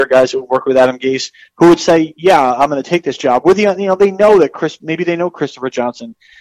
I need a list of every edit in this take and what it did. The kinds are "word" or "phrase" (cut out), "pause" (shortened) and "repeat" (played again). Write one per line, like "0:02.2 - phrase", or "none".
none

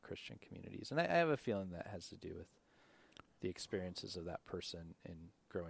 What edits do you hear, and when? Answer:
none

